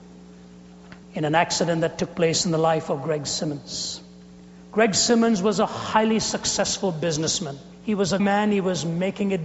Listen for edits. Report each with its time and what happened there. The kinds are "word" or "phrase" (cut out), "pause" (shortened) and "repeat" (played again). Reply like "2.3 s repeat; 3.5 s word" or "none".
1.0 s pause; 7.7 s pause; 8.2 s word

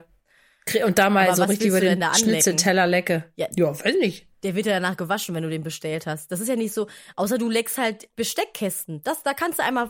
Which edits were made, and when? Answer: 8.1 s word

